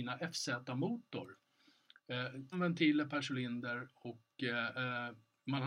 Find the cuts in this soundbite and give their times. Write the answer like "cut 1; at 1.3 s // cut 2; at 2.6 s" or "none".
cut 1; at 2.5 s